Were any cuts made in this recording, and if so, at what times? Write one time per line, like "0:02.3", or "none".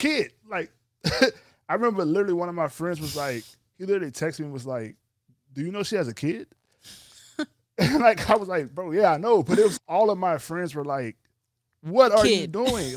0:05.1
0:09.8